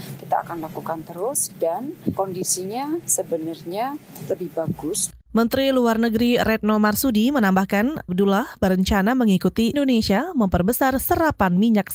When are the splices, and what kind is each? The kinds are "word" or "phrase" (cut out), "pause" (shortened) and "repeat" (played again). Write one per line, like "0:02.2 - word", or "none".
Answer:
0:05.2 - pause
0:08.1 - word
0:09.7 - word